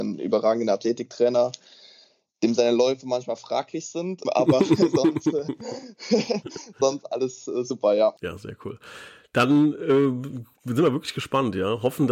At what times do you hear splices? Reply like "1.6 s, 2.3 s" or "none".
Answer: 4.2 s, 8.2 s